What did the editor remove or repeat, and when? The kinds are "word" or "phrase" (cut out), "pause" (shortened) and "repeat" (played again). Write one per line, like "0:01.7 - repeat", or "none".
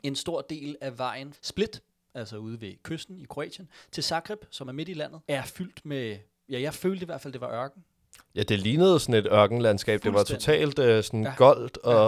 0:01.3 - word
0:05.2 - pause